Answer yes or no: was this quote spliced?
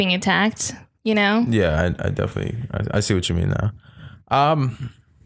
no